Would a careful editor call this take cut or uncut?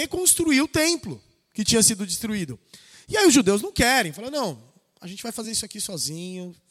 uncut